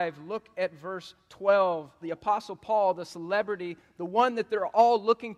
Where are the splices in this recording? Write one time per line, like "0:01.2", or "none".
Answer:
0:02.0

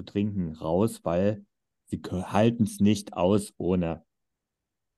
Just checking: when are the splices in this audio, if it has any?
none

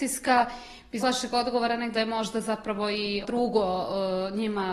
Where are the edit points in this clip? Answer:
0:01.0
0:01.9
0:03.2

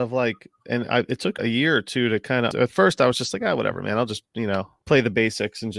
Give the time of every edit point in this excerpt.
0:01.4
0:02.5

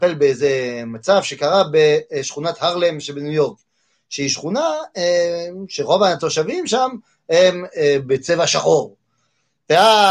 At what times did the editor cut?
none

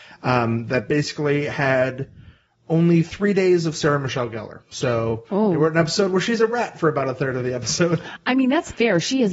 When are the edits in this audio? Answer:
none

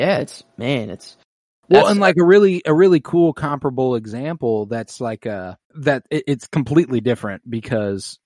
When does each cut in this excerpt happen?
0:05.6

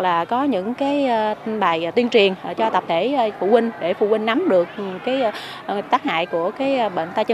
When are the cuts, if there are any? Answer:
none

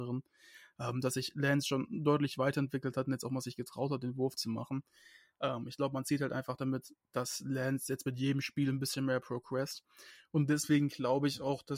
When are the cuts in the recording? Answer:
none

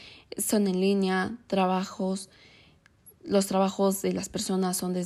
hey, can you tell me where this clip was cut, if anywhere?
none

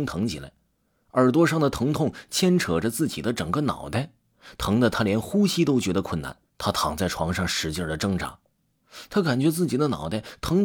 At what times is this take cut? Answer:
0:06.5

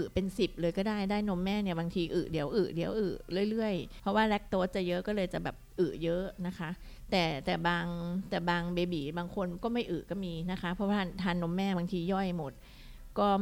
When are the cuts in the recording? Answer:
0:04.0

